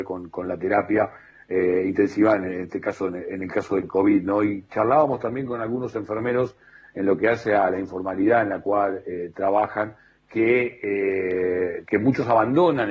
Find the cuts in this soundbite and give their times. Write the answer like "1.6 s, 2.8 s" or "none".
none